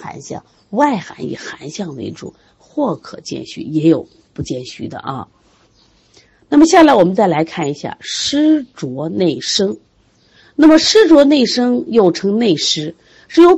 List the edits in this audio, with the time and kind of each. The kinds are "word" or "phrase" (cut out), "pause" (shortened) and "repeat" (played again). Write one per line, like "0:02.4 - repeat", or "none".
none